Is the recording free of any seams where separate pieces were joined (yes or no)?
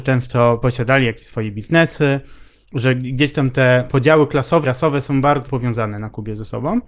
no